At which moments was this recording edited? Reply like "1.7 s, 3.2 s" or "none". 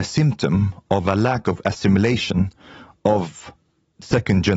none